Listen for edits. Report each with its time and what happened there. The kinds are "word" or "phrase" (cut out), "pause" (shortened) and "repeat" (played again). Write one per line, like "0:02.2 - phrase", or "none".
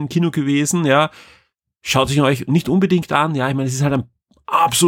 none